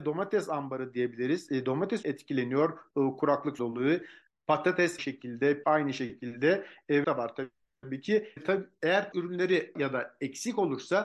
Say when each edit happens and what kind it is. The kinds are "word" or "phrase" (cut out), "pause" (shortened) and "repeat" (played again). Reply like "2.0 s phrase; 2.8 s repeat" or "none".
2.0 s word; 3.6 s word; 5.0 s word; 5.6 s word; 7.0 s word; 8.4 s word; 9.1 s word; 9.8 s word